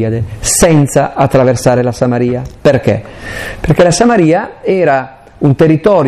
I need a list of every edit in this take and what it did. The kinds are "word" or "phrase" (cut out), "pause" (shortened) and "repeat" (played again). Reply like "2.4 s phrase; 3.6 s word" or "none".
none

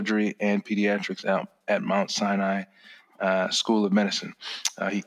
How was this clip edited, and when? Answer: none

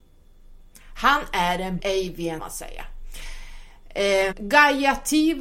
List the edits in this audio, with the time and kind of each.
1.8 s word; 2.4 s phrase; 4.3 s word

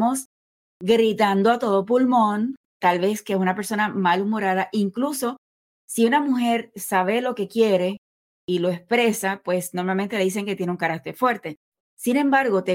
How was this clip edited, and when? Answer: none

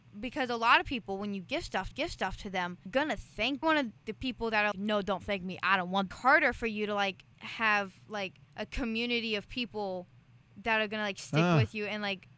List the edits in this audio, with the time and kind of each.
1.9 s repeat; 2.9 s word; 3.6 s phrase; 4.0 s word; 4.7 s word; 6.1 s phrase; 7.3 s pause; 8.4 s pause

